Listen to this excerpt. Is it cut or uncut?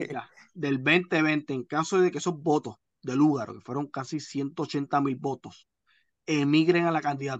uncut